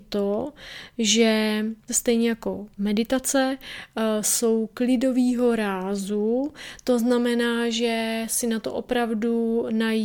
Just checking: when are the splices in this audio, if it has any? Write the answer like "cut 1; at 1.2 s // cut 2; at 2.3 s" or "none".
cut 1; at 1.9 s